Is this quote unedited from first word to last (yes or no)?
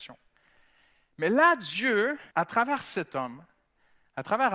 no